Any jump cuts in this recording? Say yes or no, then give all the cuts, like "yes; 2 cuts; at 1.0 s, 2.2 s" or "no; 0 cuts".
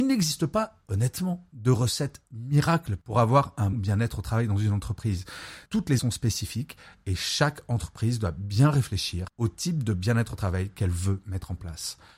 yes; 3 cuts; at 3.7 s, 5.7 s, 6.0 s